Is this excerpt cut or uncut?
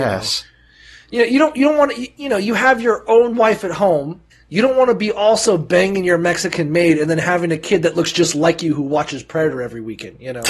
cut